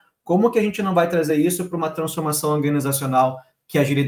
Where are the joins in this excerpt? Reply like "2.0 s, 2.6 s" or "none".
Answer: none